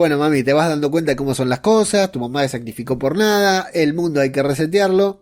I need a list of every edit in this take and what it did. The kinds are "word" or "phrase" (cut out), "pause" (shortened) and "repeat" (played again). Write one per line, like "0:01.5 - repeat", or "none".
none